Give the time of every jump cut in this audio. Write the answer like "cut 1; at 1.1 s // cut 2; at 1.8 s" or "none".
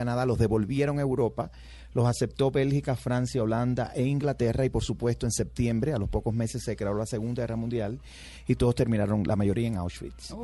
none